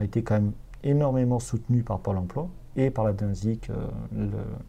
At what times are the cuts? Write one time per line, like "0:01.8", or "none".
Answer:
none